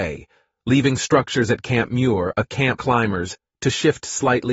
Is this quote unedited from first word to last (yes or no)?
no